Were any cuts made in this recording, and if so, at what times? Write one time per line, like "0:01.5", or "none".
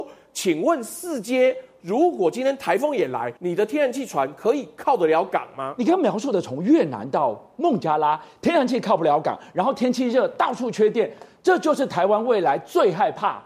0:03.4